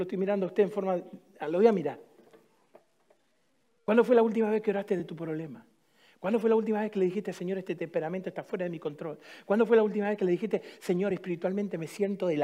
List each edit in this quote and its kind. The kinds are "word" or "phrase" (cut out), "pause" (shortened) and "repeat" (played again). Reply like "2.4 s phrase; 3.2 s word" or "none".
none